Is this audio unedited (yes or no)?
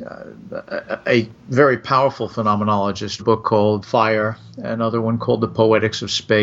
no